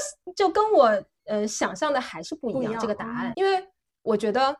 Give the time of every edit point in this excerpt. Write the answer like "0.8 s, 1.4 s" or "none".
3.3 s